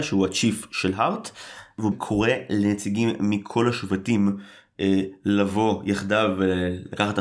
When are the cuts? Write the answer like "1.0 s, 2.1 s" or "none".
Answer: 1.9 s

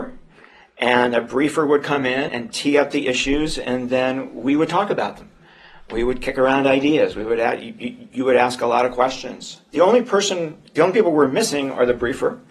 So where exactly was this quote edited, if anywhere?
2.3 s, 10.7 s

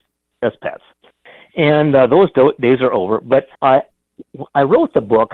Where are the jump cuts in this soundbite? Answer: 3.5 s

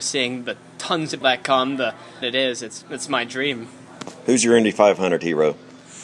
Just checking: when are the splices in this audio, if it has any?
1.2 s, 2.2 s, 2.8 s

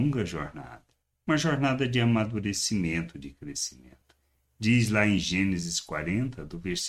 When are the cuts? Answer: none

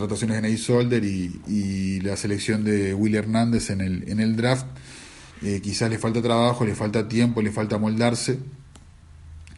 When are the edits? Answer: 5.3 s

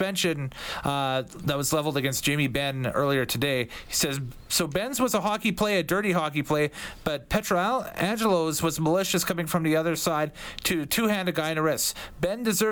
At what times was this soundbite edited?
none

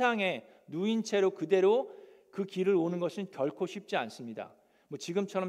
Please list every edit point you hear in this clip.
none

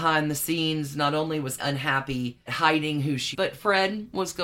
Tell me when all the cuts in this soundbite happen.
1.6 s, 2.5 s, 3.3 s

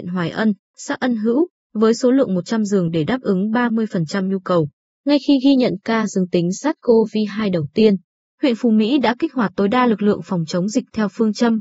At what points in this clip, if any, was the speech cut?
none

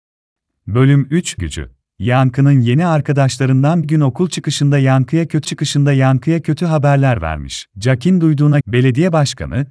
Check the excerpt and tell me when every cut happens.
1.4 s, 1.8 s, 3.8 s, 5.4 s, 7.7 s, 8.6 s

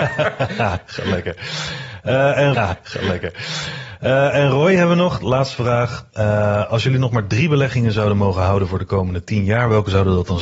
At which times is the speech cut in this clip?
2.5 s, 6.1 s

